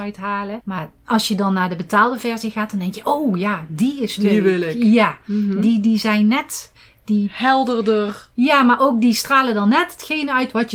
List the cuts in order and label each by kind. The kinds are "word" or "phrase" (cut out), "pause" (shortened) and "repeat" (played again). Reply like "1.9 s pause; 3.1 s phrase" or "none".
none